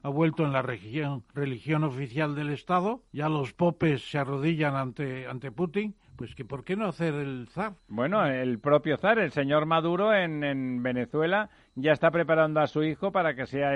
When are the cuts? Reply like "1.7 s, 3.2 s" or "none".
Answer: 1.3 s, 3.1 s, 6.0 s, 7.8 s